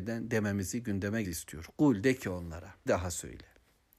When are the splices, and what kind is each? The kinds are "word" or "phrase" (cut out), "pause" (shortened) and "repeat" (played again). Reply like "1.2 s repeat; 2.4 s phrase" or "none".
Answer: 1.2 s word; 2.9 s word